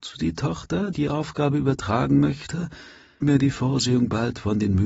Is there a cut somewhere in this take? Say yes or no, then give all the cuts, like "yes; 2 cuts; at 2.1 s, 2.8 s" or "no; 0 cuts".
yes; 2 cuts; at 0.9 s, 3.2 s